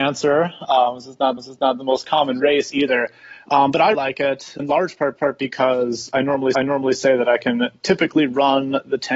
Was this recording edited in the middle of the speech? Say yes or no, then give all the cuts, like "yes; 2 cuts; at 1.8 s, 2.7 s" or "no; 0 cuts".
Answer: yes; 5 cuts; at 1.4 s, 3.9 s, 4.6 s, 5.2 s, 6.5 s